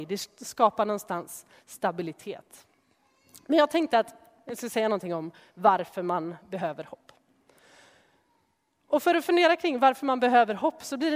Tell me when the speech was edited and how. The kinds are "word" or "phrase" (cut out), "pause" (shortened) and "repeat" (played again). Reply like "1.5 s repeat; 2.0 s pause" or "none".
none

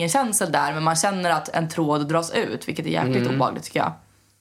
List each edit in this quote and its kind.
none

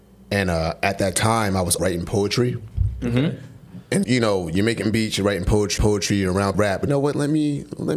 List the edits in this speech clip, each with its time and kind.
1.8 s word; 4.0 s word; 5.8 s repeat; 6.5 s phrase; 6.9 s phrase

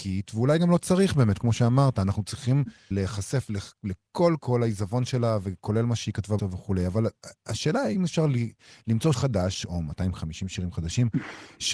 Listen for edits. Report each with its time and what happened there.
2.9 s word; 4.4 s word; 6.4 s word; 9.1 s word

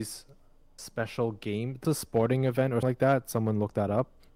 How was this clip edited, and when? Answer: 1.8 s word; 2.8 s word

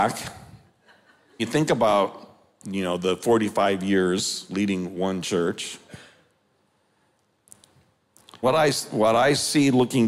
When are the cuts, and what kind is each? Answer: 1.4 s word; 8.4 s word

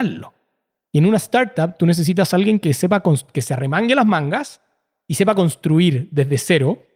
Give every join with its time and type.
none

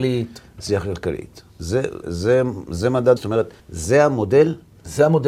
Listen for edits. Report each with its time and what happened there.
1.5 s pause; 2.0 s word; 3.2 s word; 3.6 s pause

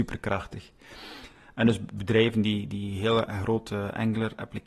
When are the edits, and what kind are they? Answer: none

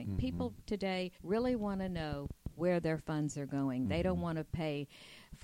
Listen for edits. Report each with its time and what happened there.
1.2 s pause

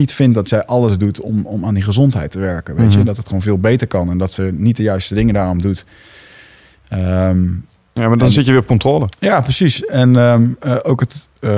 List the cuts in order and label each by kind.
none

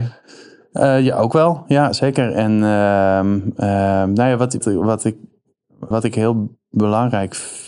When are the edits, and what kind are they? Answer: 4.6 s word; 5.9 s word

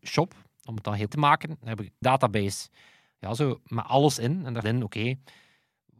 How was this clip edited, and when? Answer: 1.1 s word; 2.0 s word; 4.6 s word

